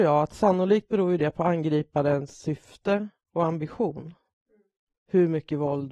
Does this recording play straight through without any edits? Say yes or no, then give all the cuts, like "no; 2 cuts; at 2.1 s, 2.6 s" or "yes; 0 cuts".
yes; 0 cuts